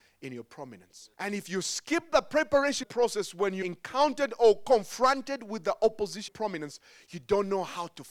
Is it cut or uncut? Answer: cut